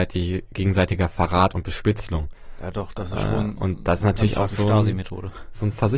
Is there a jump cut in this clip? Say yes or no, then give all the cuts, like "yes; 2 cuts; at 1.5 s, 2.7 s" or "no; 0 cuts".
no; 0 cuts